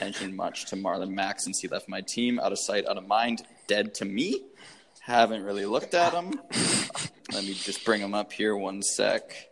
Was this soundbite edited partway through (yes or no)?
no